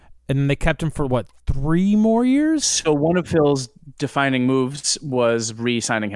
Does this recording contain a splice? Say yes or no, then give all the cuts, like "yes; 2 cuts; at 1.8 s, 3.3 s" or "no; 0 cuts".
no; 0 cuts